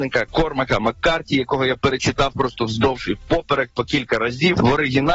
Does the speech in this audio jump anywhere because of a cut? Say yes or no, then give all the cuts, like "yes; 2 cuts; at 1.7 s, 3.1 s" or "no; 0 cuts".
no; 0 cuts